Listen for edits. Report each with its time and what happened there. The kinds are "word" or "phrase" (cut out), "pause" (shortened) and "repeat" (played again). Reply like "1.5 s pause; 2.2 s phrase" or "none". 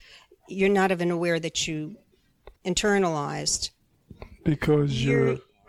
2.6 s pause